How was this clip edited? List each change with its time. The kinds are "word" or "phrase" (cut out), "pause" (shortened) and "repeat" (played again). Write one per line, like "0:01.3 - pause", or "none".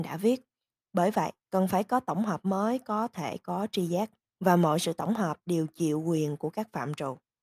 0:01.4 - pause
0:04.2 - pause